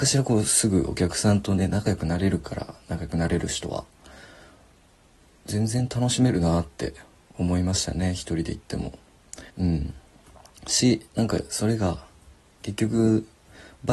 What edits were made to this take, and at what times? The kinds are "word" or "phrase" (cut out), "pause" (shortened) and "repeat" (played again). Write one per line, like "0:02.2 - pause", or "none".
0:09.5 - pause